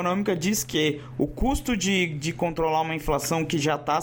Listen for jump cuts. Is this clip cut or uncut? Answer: uncut